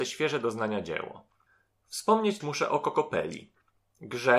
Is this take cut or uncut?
cut